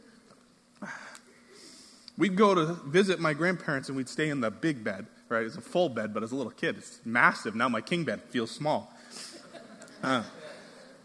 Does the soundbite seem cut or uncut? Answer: uncut